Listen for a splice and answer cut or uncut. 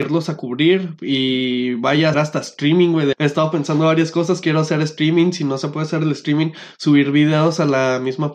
cut